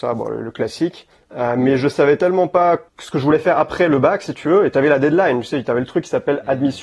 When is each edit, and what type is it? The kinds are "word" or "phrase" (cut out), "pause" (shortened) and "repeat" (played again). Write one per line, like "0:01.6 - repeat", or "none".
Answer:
0:01.1 - pause
0:02.9 - pause